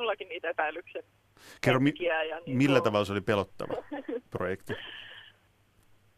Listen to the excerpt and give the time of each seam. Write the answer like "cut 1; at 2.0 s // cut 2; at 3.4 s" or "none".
cut 1; at 4.3 s